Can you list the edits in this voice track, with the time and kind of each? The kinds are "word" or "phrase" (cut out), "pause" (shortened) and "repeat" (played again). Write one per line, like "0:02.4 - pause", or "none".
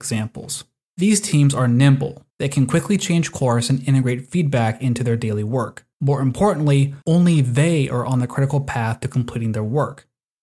0:02.3 - pause
0:05.9 - pause
0:07.0 - pause